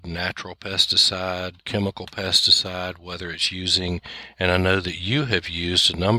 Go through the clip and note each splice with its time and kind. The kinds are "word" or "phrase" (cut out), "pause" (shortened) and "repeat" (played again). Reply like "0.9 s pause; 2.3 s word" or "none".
none